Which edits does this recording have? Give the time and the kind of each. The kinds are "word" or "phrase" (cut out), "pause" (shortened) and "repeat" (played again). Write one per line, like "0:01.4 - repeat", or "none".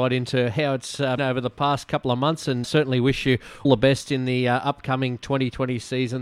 0:01.2 - word
0:02.6 - word
0:03.6 - word